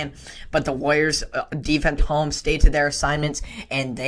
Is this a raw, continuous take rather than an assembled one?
no; 1 cut; at 2.0 s

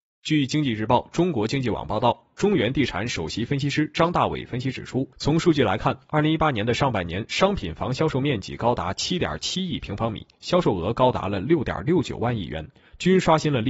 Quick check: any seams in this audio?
yes; 1 cut; at 5.1 s

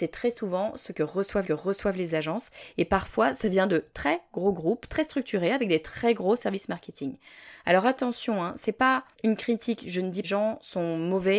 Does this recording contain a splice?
yes; 3 cuts; at 1.4 s, 9.1 s, 10.2 s

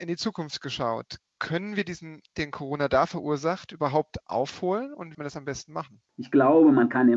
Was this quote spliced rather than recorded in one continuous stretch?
yes; 2 cuts; at 2.3 s, 5.1 s

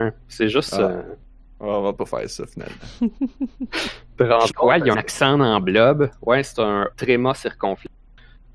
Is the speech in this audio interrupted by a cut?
yes; 4 cuts; at 2.0 s, 4.5 s, 4.9 s, 6.9 s

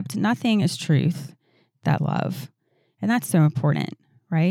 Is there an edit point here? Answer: yes; 1 cut; at 2.0 s

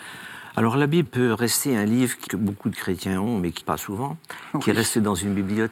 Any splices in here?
yes; 3 cuts; at 1.0 s, 2.3 s, 3.6 s

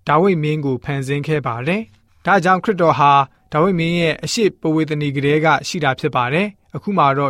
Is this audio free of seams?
yes; 0 cuts

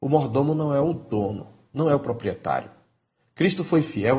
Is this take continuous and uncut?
yes; 0 cuts

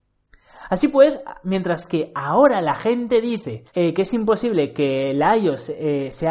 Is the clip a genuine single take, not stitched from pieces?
no; 1 cut; at 3.7 s

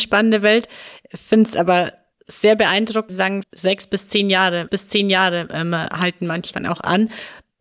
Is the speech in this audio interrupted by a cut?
yes; 5 cuts; at 2.1 s, 3.1 s, 3.4 s, 4.7 s, 6.5 s

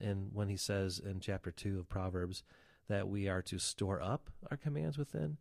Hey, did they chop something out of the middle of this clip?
no; 0 cuts

